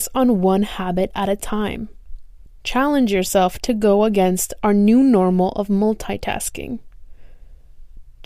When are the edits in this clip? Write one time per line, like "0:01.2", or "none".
none